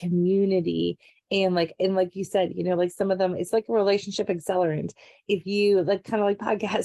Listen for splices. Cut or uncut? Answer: uncut